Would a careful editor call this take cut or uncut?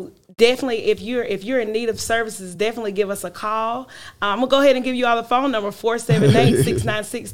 uncut